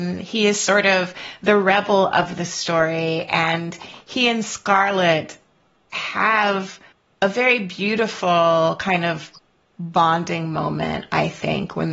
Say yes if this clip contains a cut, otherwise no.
no